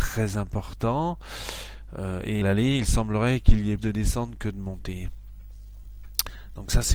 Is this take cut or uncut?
cut